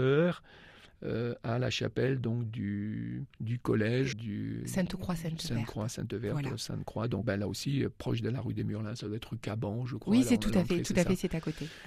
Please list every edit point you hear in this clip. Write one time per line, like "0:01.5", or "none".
0:03.3
0:04.1
0:07.2